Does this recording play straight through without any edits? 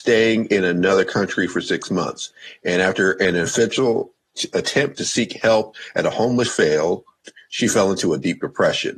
no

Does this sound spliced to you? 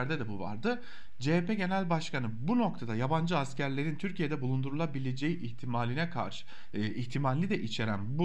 no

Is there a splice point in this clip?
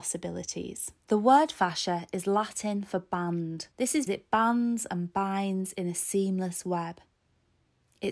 yes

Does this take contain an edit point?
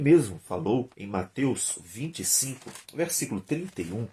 yes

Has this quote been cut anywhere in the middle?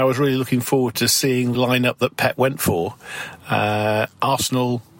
yes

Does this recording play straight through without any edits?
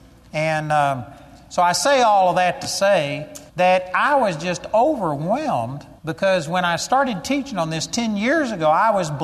no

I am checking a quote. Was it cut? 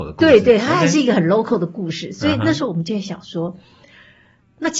no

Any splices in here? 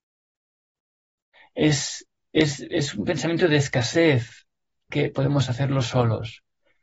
yes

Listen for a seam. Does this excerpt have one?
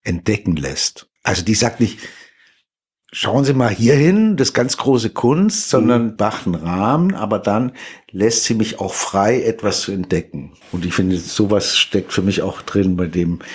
yes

